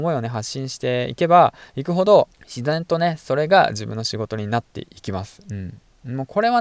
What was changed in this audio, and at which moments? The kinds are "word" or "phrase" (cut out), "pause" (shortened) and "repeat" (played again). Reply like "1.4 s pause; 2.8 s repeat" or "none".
2.3 s pause

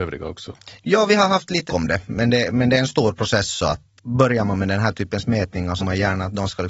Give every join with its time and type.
1.7 s word; 4.0 s word; 5.8 s word

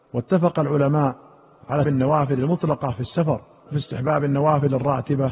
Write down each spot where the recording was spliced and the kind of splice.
1.8 s word; 3.7 s word

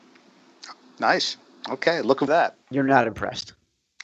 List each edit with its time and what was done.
2.3 s phrase; 2.6 s pause

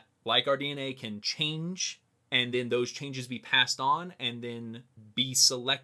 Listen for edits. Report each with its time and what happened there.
none

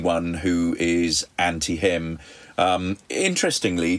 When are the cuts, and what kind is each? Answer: none

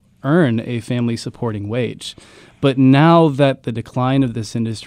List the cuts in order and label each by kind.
none

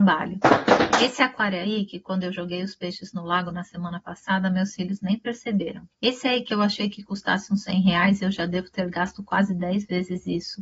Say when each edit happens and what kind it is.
5.9 s pause

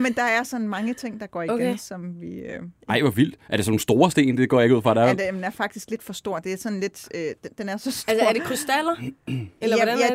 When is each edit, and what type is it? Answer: 2.8 s pause

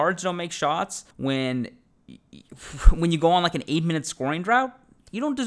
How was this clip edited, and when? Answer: 1.1 s pause

